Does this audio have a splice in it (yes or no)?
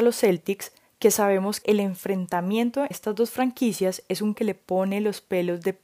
yes